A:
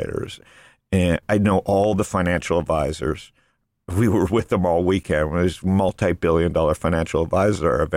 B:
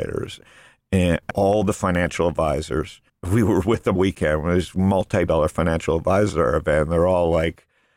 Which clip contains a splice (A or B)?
B